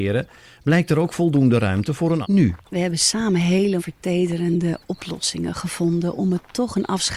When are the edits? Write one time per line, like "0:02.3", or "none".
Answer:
0:02.2
0:02.6
0:03.8